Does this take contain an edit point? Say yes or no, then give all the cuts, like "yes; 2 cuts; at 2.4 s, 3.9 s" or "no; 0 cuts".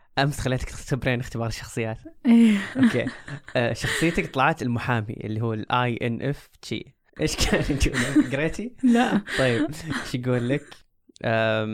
yes; 1 cut; at 7.1 s